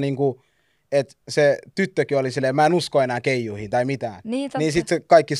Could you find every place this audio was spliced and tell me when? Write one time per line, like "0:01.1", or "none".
0:01.2

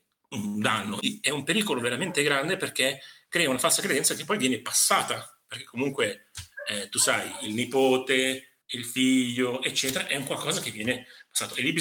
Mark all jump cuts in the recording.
0:08.6

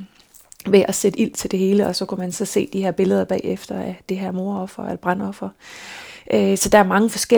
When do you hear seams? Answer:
none

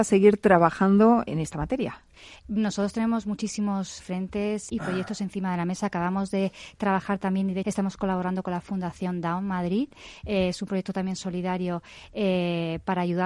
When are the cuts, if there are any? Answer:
0:01.3
0:04.0
0:04.7
0:07.6

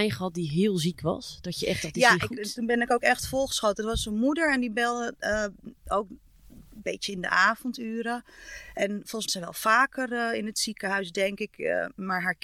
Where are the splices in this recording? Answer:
0:09.3

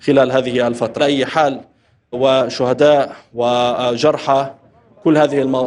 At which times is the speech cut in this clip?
0:01.0
0:02.1

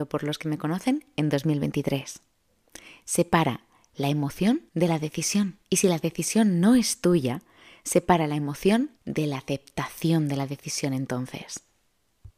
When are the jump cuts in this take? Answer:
0:04.7
0:05.7
0:09.0

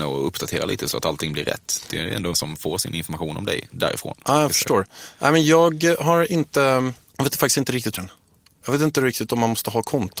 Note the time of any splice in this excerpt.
0:02.3
0:08.0

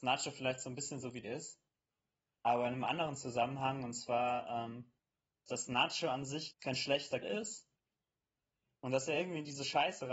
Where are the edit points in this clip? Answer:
0:01.2
0:05.5
0:06.5
0:07.2

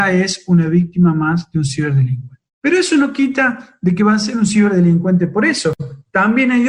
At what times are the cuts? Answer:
0:02.5

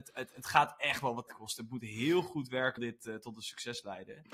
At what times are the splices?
0:01.3
0:02.8

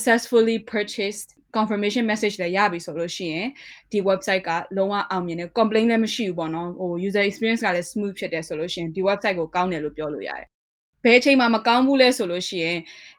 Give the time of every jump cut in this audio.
none

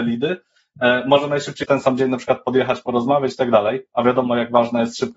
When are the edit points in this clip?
0:01.6

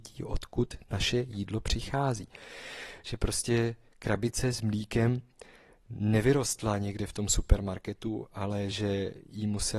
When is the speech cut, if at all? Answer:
none

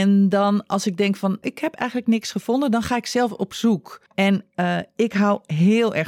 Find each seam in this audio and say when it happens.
0:01.4
0:04.1

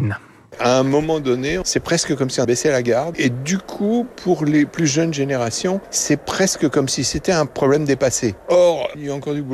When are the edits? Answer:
0:02.4

